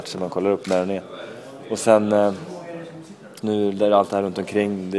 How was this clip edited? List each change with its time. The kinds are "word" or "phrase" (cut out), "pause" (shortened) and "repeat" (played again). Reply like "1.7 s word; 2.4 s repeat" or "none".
3.4 s word